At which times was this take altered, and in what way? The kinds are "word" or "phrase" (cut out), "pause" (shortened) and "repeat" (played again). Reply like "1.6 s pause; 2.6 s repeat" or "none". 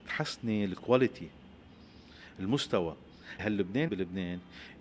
3.4 s word; 3.9 s word